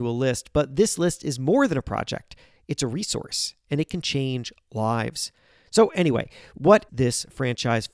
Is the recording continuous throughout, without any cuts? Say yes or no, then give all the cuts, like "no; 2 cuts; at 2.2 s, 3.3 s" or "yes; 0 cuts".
no; 1 cut; at 6.9 s